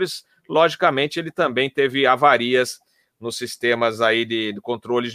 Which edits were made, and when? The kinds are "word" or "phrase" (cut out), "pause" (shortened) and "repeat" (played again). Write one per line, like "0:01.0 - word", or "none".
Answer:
none